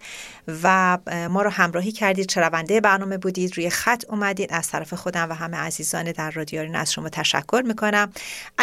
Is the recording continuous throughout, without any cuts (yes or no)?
yes